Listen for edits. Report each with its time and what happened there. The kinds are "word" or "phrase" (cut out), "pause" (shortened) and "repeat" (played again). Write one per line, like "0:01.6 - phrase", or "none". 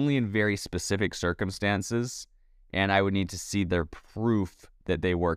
none